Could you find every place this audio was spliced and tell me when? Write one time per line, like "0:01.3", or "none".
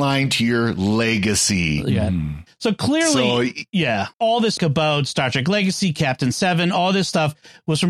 0:04.1
0:04.6